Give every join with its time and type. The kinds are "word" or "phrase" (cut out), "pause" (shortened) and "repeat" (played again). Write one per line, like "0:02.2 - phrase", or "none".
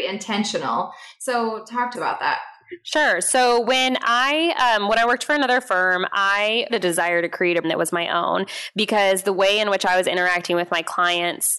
0:01.9 - word
0:06.7 - phrase
0:07.6 - word